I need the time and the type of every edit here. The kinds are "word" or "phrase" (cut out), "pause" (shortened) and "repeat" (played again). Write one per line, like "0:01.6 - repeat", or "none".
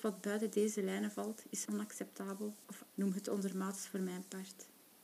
0:01.7 - word
0:02.9 - word